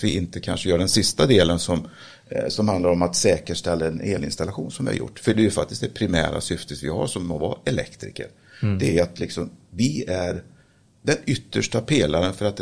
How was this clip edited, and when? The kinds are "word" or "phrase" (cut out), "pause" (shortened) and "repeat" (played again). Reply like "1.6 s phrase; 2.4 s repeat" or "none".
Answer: none